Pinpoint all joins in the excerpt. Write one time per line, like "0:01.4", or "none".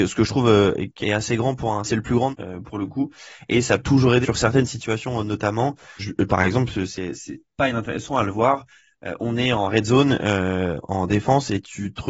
0:01.0
0:01.8
0:02.3
0:03.8
0:04.2
0:06.0
0:07.4

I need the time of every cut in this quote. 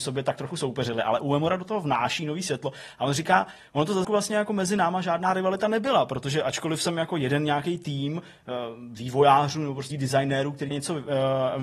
0:04.0
0:09.9
0:10.7

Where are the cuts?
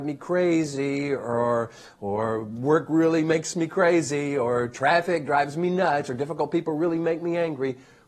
none

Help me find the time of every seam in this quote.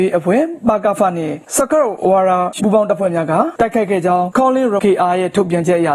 0:02.6
0:04.8

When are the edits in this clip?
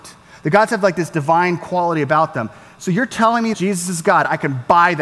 0:03.5

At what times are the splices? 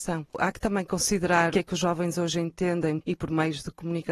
0:01.5
0:03.0

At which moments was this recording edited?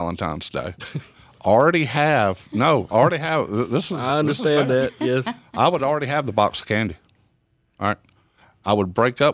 none

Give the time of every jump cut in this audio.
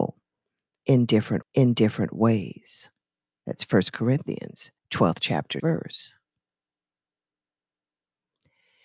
0:01.4
0:04.8
0:05.6

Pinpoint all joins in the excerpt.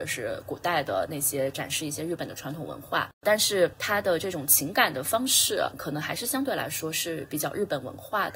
0:03.1

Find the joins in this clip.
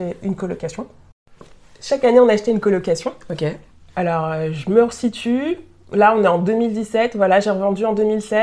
0:01.6
0:03.7

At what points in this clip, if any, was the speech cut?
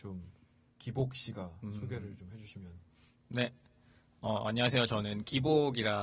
none

